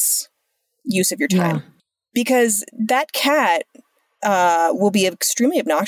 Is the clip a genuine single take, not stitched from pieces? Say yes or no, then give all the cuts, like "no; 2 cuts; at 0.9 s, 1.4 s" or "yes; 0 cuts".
yes; 0 cuts